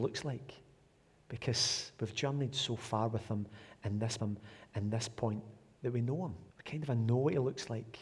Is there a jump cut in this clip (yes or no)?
yes